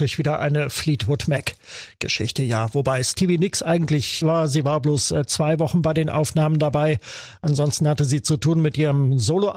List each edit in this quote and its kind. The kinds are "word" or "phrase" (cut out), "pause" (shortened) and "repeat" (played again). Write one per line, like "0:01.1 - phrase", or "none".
0:04.2 - phrase